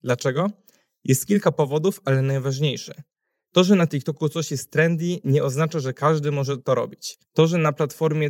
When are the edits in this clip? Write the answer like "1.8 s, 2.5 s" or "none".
none